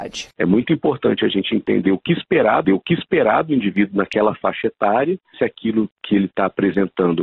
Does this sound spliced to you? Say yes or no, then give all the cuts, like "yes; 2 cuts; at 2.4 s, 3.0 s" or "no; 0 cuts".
yes; 2 cuts; at 2.6 s, 5.3 s